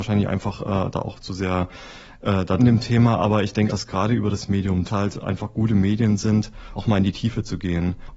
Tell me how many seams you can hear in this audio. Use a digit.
4